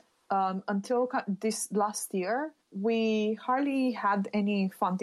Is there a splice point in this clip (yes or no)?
yes